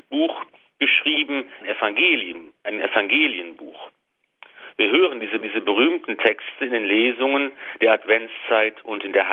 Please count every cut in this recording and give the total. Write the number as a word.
two